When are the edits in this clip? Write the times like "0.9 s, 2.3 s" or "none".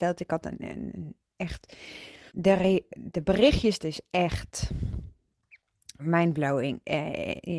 2.3 s, 2.9 s, 3.8 s, 6.0 s